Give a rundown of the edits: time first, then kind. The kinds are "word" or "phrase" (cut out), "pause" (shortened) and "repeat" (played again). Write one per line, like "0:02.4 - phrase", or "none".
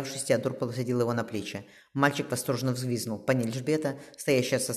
none